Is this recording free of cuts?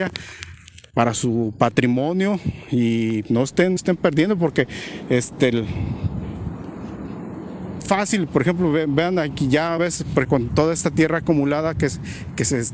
no; 5 cuts; at 3.2 s, 3.8 s, 7.8 s, 9.8 s, 10.2 s

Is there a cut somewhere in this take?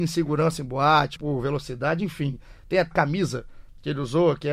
yes; 2 cuts; at 1.2 s, 2.9 s

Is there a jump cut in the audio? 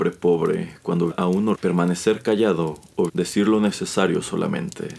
yes; 3 cuts; at 1.1 s, 1.5 s, 3.1 s

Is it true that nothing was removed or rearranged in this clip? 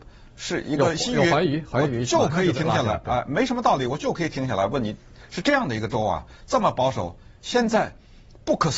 yes; 0 cuts

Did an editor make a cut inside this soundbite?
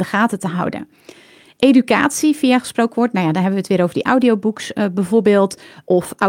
no; 0 cuts

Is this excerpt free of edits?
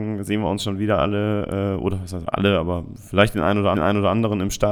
no; 1 cut; at 3.7 s

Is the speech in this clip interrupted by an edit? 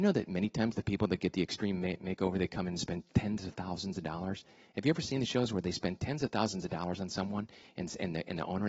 no; 0 cuts

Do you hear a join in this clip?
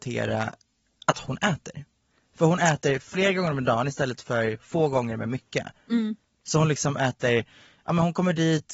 no; 0 cuts

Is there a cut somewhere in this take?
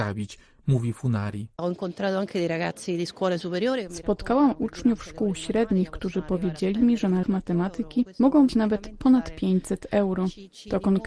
yes; 2 cuts; at 7.2 s, 8.5 s

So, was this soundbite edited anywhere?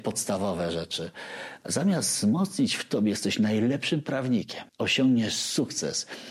yes; 1 cut; at 4.7 s

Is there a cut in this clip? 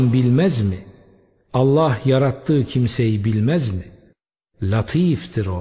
no; 0 cuts

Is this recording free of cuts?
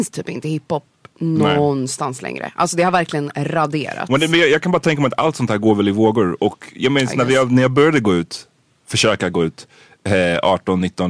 yes; 0 cuts

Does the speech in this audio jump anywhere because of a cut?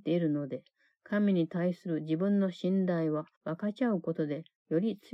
yes; 1 cut; at 3.3 s

